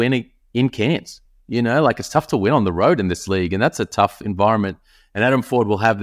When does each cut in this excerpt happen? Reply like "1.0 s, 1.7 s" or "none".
none

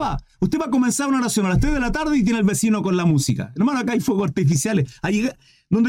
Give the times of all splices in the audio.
none

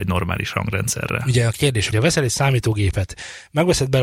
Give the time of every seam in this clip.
1.9 s

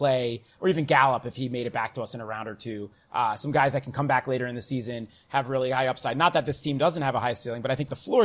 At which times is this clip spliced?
none

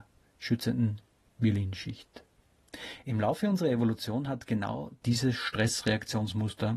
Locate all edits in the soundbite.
none

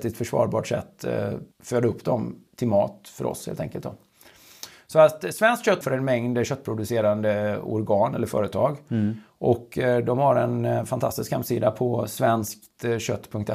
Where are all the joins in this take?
1.5 s, 2.5 s, 5.8 s

